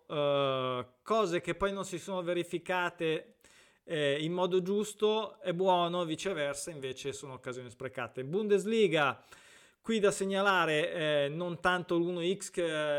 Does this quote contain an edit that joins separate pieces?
no; 0 cuts

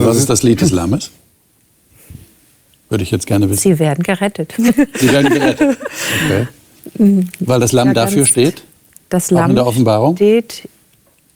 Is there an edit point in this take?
no; 0 cuts

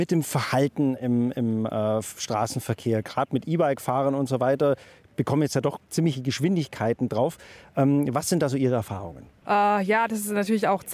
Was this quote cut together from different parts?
no; 0 cuts

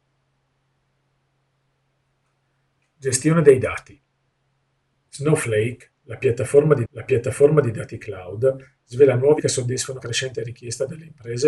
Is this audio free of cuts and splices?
no; 3 cuts; at 6.9 s, 9.4 s, 10.0 s

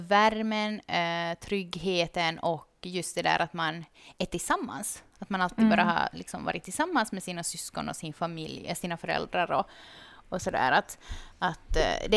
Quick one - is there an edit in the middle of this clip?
no; 0 cuts

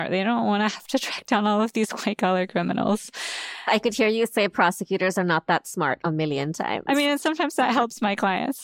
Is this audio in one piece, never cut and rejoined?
yes; 0 cuts

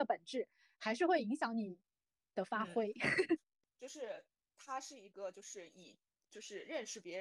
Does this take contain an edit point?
no; 0 cuts

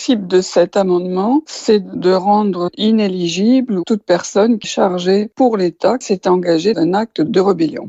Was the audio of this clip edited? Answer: yes; 4 cuts; at 4.6 s, 5.3 s, 6.0 s, 6.7 s

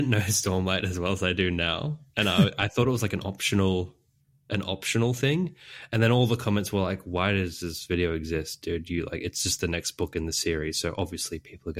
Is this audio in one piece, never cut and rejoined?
yes; 0 cuts

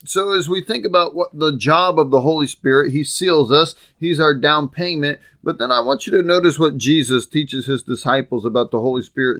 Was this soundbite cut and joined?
no; 0 cuts

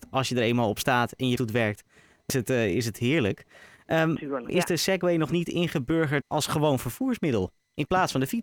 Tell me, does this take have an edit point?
yes; 4 cuts; at 1.4 s, 2.3 s, 4.5 s, 6.2 s

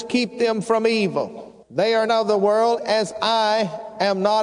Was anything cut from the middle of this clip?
yes; 3 cuts; at 1.6 s, 2.1 s, 2.8 s

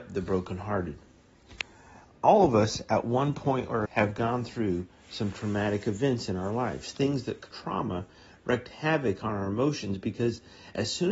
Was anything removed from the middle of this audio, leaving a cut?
yes; 2 cuts; at 3.9 s, 7.5 s

